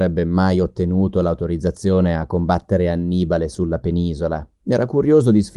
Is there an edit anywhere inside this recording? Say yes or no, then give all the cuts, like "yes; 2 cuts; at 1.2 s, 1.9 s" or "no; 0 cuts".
yes; 1 cut; at 4.5 s